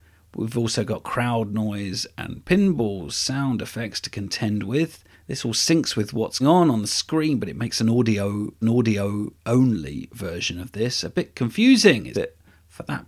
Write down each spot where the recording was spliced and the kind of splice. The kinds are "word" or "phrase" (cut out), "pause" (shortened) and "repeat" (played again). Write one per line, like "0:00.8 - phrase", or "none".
0:05.1 - pause
0:06.4 - word
0:08.6 - repeat
0:12.1 - phrase